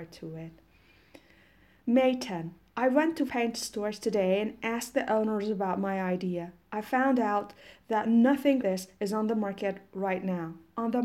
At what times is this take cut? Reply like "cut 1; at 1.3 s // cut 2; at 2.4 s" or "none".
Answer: cut 1; at 3.3 s // cut 2; at 8.6 s

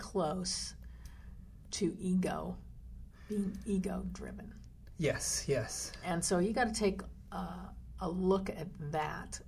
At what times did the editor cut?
none

